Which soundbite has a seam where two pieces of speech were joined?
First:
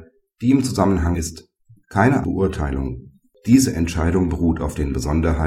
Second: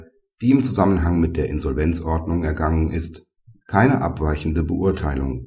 first; 2 cuts; at 1.1 s, 2.2 s

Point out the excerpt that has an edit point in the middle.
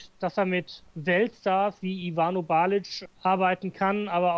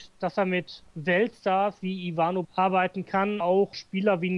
second; 2 cuts; at 2.4 s, 3.4 s

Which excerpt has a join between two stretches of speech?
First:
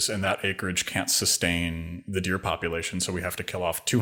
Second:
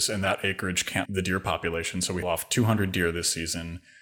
second; 2 cuts; at 1.1 s, 2.2 s

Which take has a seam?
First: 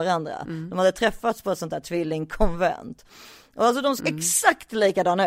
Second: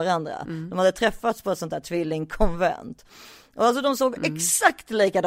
first; 1 cut; at 4.0 s

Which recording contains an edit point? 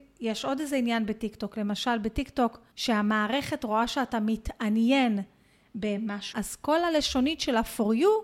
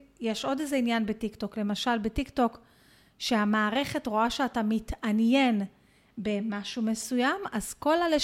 first; 2 cuts; at 2.7 s, 6.3 s

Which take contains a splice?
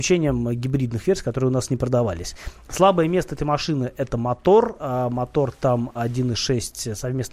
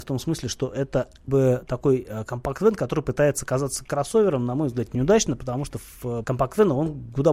second; 3 cuts; at 1.3 s, 4.9 s, 6.2 s

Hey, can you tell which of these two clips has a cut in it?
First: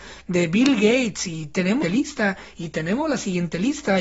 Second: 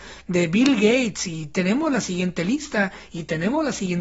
first; 1 cut; at 1.8 s

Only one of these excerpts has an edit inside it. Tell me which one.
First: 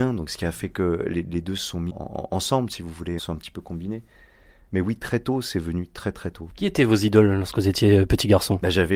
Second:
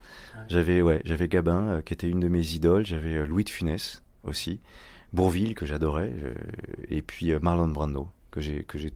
first; 2 cuts; at 1.9 s, 3.2 s

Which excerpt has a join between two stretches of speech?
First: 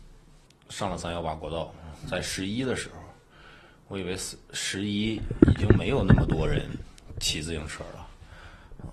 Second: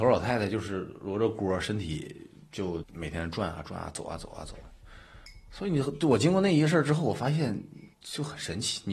second; 1 cut; at 7.9 s

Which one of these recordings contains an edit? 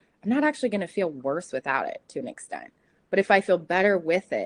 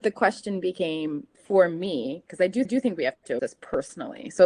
second; 3 cuts; at 1.3 s, 2.6 s, 3.4 s

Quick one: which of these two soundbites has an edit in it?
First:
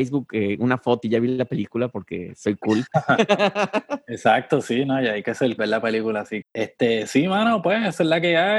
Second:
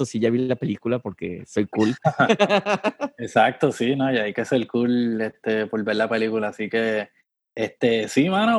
first; 3 cuts; at 1.0 s, 5.6 s, 6.4 s

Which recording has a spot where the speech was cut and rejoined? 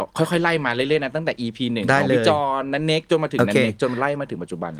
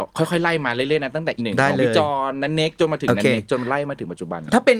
second; 1 cut; at 1.4 s

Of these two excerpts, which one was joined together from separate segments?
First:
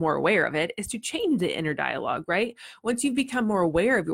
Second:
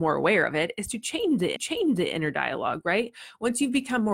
second; 1 cut; at 1.6 s

